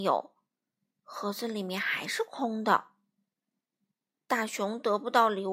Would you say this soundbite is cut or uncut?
uncut